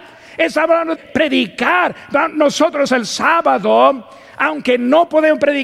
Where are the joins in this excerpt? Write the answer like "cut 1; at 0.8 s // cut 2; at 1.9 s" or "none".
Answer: cut 1; at 1.0 s // cut 2; at 2.9 s